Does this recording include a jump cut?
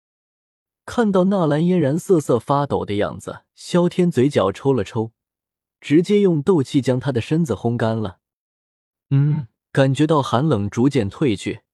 yes; 2 cuts; at 3.5 s, 9.6 s

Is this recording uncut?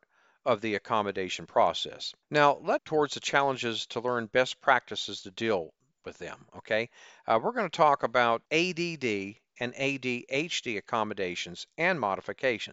no; 3 cuts; at 2.2 s, 2.8 s, 8.5 s

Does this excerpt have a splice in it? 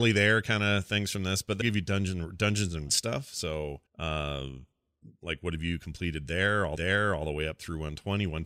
yes; 4 cuts; at 1.6 s, 2.9 s, 3.9 s, 6.8 s

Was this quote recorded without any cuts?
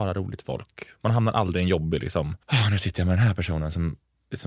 no; 1 cut; at 2.4 s

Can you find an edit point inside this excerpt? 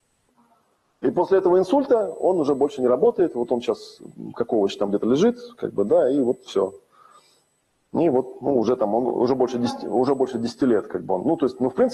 no; 0 cuts

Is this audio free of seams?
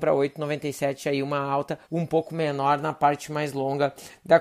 no; 1 cut; at 1.8 s

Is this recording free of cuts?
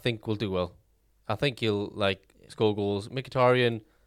yes; 0 cuts

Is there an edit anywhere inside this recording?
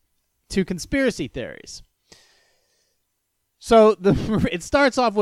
no; 0 cuts

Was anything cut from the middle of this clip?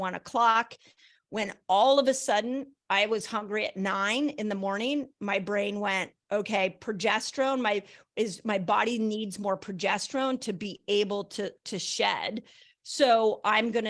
no; 0 cuts

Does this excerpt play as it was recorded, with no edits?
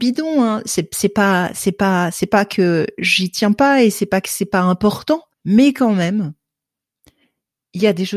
no; 1 cut; at 5.3 s

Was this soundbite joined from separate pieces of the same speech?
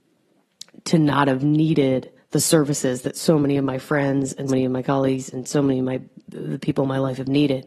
yes; 2 cuts; at 2.2 s, 4.5 s

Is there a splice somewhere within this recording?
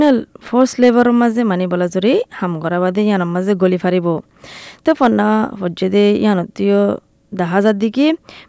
no; 0 cuts

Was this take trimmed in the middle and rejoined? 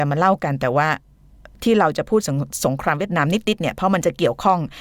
no; 0 cuts

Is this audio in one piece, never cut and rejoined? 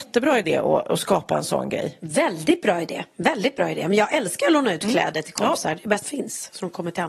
no; 1 cut; at 6.0 s

